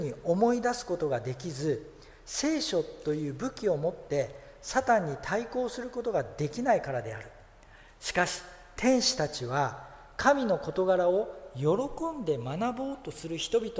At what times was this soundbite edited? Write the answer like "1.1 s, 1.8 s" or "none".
none